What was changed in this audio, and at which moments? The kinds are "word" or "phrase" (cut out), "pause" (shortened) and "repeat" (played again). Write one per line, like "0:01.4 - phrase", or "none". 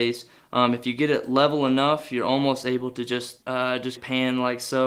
0:03.4 - pause
0:04.0 - phrase